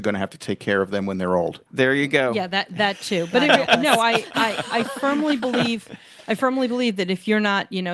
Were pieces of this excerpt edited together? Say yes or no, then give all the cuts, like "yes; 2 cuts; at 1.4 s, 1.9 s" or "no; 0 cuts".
no; 0 cuts